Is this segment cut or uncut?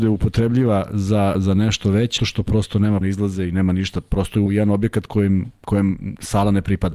cut